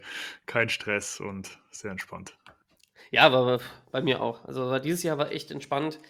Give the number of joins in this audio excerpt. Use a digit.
0